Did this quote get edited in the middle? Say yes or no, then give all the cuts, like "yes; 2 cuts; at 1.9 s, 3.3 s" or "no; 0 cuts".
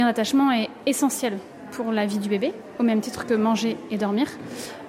no; 0 cuts